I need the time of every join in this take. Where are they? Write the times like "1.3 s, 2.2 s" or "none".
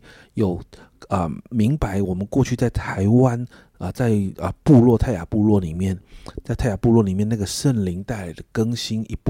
none